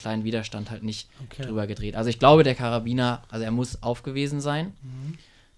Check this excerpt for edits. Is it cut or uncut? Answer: uncut